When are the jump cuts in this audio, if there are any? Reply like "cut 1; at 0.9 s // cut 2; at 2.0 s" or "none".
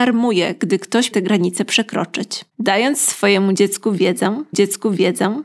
cut 1; at 1.1 s // cut 2; at 2.5 s // cut 3; at 4.5 s